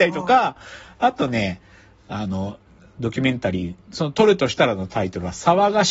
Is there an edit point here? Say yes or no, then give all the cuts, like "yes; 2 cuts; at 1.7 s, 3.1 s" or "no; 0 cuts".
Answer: no; 0 cuts